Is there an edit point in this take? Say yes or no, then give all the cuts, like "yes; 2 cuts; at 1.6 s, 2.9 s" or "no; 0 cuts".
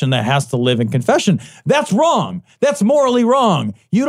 no; 0 cuts